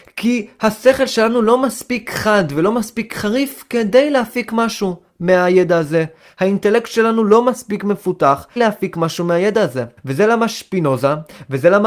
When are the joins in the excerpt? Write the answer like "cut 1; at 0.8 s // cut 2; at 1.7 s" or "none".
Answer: cut 1; at 8.6 s // cut 2; at 10.0 s